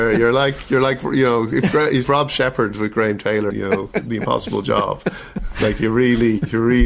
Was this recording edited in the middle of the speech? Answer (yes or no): yes